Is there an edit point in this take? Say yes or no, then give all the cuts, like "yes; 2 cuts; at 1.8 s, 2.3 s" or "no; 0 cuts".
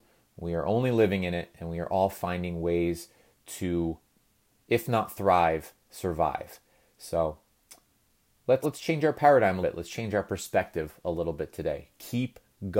yes; 2 cuts; at 8.6 s, 9.6 s